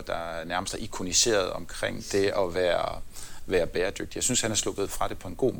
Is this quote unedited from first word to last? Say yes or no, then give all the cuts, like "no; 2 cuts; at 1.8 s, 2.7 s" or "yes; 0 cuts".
yes; 0 cuts